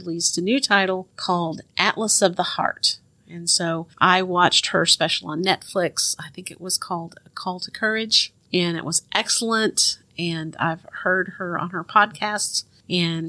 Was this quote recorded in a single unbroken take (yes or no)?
yes